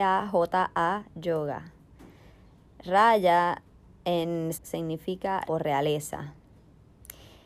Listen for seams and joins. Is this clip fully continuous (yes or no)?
no